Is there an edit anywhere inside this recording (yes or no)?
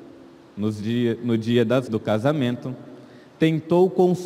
yes